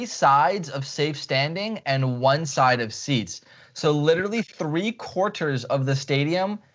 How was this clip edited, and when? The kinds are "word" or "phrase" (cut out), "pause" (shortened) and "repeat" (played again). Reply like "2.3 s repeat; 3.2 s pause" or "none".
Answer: none